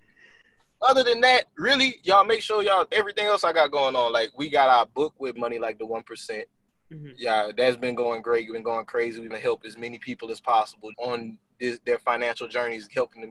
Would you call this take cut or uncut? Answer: cut